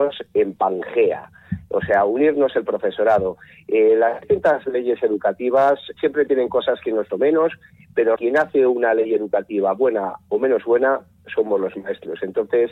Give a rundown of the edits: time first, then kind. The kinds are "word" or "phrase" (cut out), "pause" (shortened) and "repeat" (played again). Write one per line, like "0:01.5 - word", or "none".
0:05.9 - word
0:07.1 - phrase
0:08.2 - word